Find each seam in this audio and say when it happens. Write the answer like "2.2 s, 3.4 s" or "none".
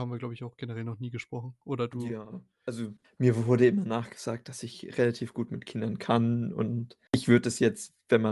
3.0 s, 7.1 s